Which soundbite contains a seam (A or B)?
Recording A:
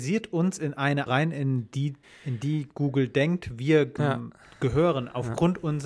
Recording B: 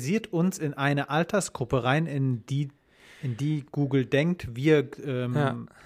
A